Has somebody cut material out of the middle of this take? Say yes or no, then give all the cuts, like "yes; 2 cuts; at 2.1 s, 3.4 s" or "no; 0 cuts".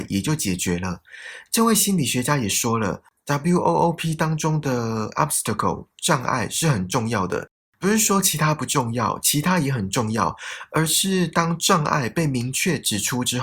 no; 0 cuts